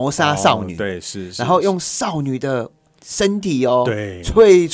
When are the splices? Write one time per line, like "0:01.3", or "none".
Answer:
none

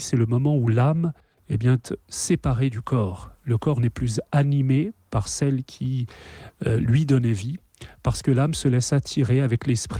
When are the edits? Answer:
0:02.0

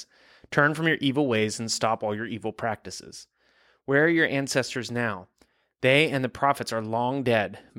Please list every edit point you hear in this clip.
none

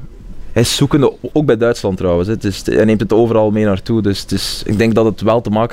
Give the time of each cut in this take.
none

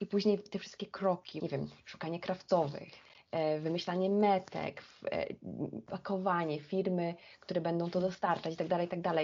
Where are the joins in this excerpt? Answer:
none

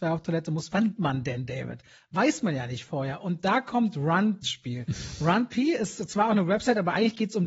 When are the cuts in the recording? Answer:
0:01.0
0:04.4

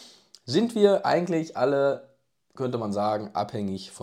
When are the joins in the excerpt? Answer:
none

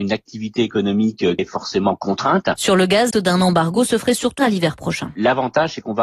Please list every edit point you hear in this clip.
0:01.4
0:03.1
0:04.4

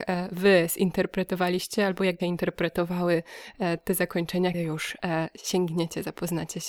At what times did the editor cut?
0:02.2
0:04.5

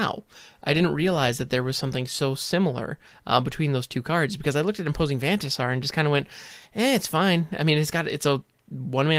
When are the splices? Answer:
none

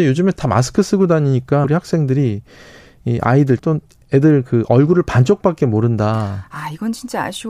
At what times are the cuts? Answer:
0:01.6
0:03.6

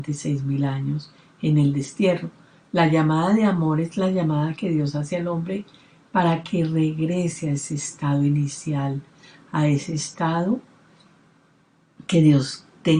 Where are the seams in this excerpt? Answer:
none

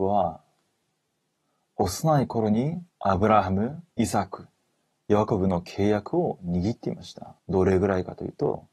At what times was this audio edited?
0:02.9
0:03.9
0:07.4

